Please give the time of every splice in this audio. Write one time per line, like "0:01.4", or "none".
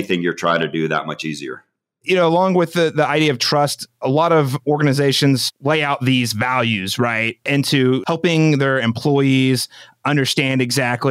none